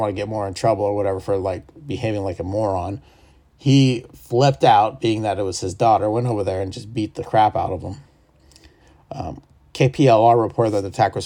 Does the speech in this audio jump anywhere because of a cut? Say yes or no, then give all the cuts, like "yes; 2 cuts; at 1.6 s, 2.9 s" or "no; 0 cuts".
no; 0 cuts